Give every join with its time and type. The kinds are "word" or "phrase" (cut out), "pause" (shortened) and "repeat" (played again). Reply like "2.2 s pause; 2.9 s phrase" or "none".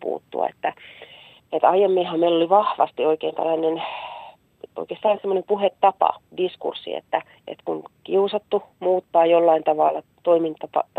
1.4 s pause; 7.3 s pause